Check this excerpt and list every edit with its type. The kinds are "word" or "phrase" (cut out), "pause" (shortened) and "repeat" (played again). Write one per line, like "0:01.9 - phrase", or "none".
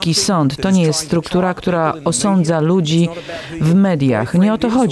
none